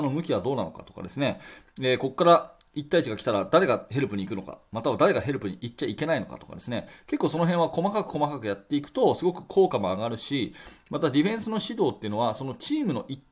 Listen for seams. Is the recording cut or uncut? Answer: uncut